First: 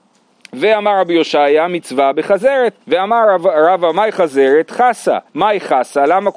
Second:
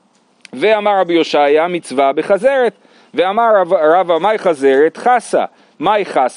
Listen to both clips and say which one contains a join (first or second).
first